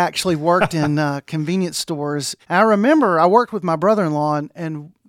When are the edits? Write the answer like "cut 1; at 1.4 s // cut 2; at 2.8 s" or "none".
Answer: cut 1; at 2.4 s